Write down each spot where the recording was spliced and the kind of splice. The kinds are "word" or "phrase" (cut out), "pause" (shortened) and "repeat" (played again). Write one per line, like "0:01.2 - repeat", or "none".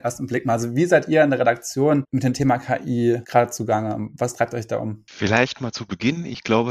0:05.1 - pause